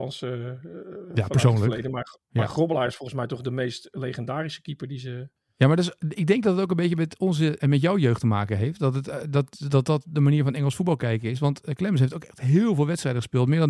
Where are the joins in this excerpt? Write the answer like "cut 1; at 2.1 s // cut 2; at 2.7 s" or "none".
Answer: cut 1; at 7.6 s